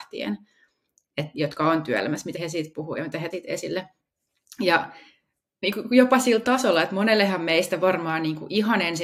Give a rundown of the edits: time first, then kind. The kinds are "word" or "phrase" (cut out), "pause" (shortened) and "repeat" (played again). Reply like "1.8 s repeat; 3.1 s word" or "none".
2.3 s word; 3.3 s word